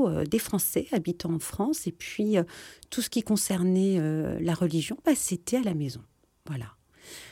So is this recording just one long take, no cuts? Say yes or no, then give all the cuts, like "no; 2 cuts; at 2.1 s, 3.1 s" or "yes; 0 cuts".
yes; 0 cuts